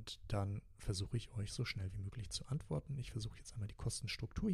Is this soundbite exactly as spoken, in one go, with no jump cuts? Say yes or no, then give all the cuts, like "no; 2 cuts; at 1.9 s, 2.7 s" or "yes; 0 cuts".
yes; 0 cuts